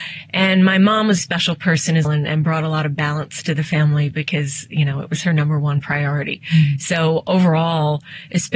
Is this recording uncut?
no; 2 cuts; at 1.2 s, 2.0 s

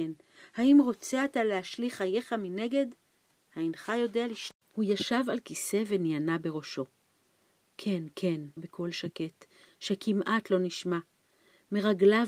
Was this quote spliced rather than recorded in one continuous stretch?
yes; 2 cuts; at 4.6 s, 8.6 s

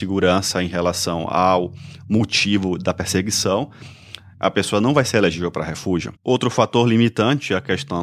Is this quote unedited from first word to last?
no; 1 cut; at 6.2 s

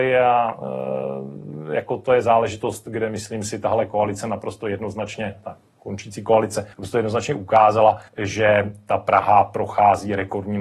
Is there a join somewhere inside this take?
yes; 2 cuts; at 6.7 s, 8.1 s

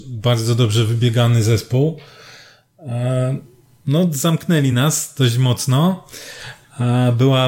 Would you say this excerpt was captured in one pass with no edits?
yes; 0 cuts

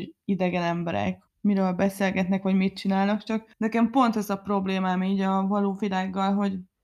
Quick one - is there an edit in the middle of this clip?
yes; 2 cuts; at 1.3 s, 3.5 s

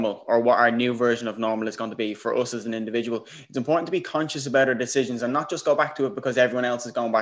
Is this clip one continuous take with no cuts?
yes; 0 cuts

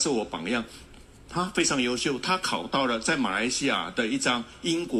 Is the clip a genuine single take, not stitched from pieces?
yes; 0 cuts

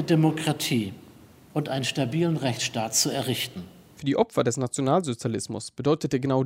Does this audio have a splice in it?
no; 0 cuts

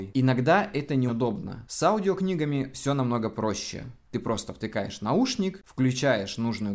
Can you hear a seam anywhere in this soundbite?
yes; 1 cut; at 1.1 s

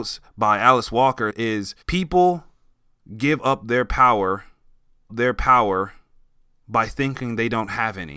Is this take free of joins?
no; 3 cuts; at 1.3 s, 1.8 s, 5.1 s

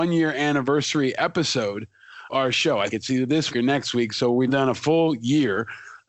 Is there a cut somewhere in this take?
yes; 4 cuts; at 2.3 s, 2.9 s, 3.5 s, 4.5 s

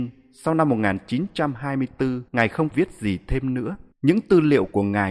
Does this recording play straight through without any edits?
no; 3 cuts; at 2.3 s, 2.7 s, 3.9 s

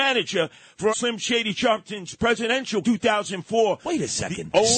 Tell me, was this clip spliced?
yes; 2 cuts; at 0.9 s, 2.8 s

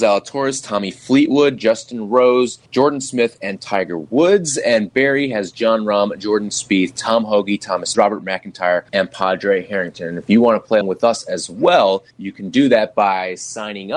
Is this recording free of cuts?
no; 5 cuts; at 2.7 s, 7.9 s, 8.9 s, 10.8 s, 12.1 s

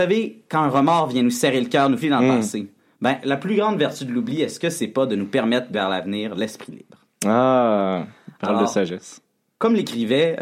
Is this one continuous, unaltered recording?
no; 2 cuts; at 2.0 s, 5.7 s

